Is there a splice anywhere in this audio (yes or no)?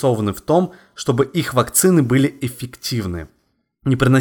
no